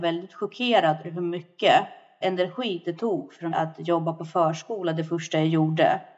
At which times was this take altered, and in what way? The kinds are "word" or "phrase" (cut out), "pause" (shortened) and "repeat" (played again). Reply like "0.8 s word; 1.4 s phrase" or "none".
1.0 s word; 2.2 s word; 3.5 s word